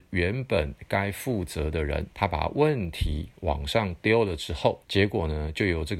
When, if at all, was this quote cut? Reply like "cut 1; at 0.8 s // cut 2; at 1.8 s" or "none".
cut 1; at 2.1 s // cut 2; at 4.8 s